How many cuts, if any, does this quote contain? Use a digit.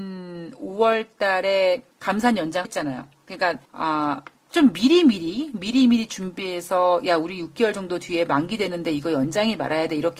3